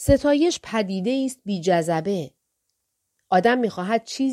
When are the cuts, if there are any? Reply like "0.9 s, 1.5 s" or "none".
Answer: none